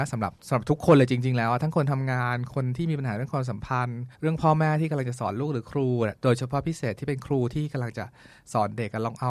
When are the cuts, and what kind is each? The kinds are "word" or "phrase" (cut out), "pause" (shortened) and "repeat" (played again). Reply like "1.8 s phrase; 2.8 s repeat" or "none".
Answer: 4.1 s pause